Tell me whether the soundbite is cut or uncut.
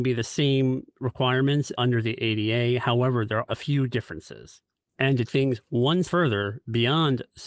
cut